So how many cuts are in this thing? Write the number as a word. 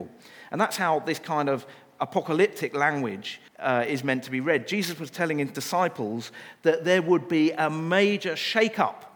one